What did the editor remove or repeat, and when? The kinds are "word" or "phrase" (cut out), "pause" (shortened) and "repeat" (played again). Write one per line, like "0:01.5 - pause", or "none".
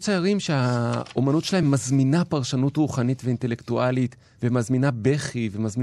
none